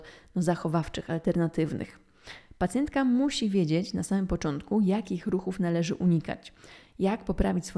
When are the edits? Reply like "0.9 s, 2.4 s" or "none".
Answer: none

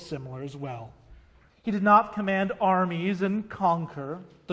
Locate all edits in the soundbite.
1.5 s

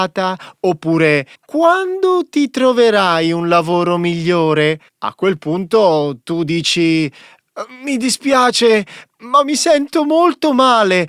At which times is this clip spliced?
1.3 s, 4.9 s

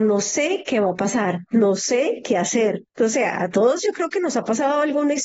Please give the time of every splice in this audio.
2.9 s

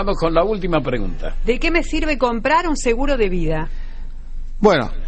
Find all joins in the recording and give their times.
none

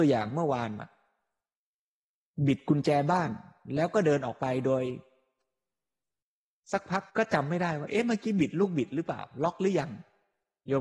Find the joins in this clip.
7.1 s

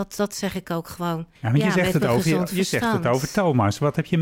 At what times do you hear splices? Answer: 1.3 s

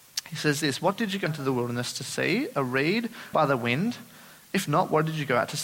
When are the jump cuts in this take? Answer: 1.3 s, 3.3 s

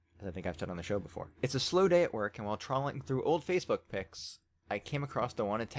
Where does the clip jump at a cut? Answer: 1.3 s

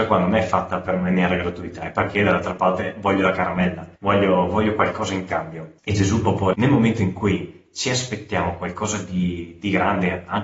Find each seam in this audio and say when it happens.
4.0 s, 5.8 s, 6.5 s

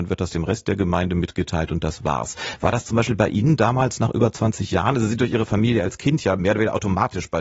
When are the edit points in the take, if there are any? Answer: none

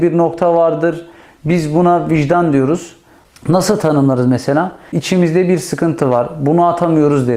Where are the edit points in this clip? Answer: none

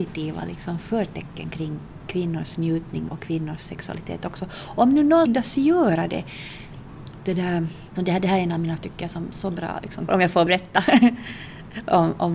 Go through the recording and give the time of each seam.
3.1 s, 5.3 s, 7.2 s, 8.0 s, 8.8 s, 10.1 s, 10.5 s

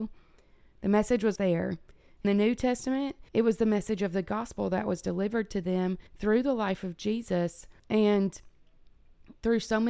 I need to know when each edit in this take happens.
1.4 s, 2.2 s, 3.3 s, 6.1 s, 7.8 s

